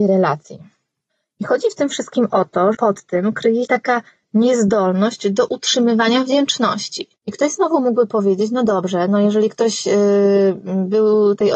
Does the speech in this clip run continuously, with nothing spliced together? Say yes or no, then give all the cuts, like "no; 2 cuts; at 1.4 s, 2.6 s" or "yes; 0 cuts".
no; 3 cuts; at 2.7 s, 3.6 s, 7.2 s